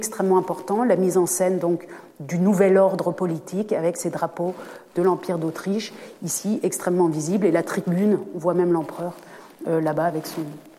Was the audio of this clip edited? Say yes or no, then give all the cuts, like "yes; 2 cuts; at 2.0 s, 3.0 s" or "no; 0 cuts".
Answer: no; 0 cuts